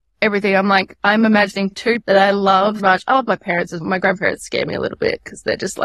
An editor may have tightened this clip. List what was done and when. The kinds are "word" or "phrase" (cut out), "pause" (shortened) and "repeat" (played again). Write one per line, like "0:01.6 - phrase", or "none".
0:02.0 - word
0:02.8 - word
0:03.8 - word